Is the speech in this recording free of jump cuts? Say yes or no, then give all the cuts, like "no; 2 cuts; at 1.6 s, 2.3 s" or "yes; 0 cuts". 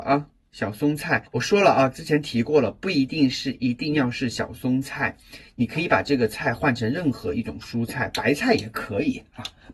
no; 1 cut; at 1.3 s